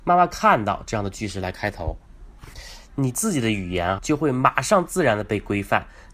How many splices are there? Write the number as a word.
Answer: one